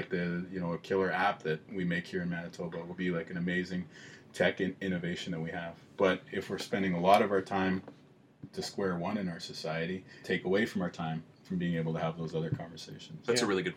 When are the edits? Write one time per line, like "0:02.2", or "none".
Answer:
0:03.0
0:08.5
0:10.2
0:11.3